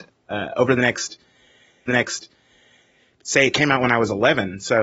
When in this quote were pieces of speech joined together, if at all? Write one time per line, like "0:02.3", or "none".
0:01.9